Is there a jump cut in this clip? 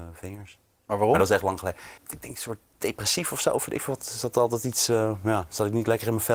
yes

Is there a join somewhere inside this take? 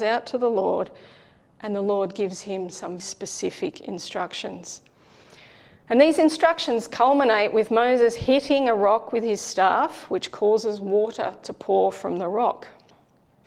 yes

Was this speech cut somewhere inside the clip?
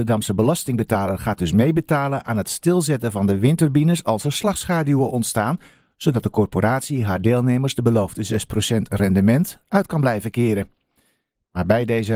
no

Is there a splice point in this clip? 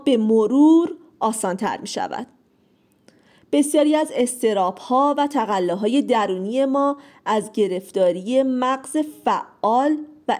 no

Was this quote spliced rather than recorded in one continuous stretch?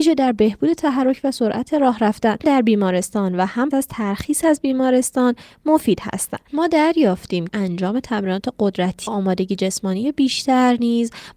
yes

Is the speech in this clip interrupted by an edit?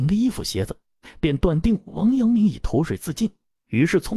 no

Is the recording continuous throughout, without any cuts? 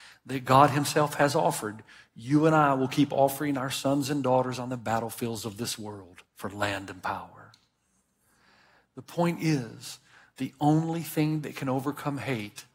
yes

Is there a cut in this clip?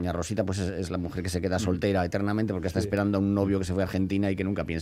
no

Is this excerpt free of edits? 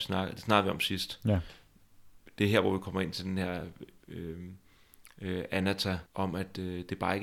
no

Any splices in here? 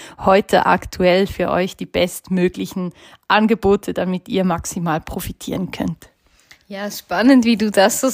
no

